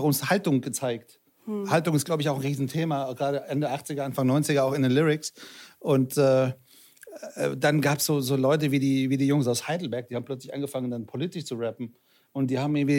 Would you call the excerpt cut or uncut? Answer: uncut